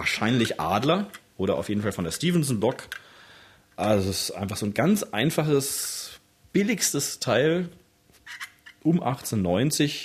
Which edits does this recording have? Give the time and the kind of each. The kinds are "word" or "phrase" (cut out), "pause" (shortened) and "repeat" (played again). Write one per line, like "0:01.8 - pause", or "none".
none